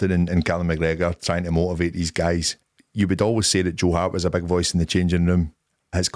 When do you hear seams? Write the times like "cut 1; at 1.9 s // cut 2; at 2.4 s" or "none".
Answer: cut 1; at 2.6 s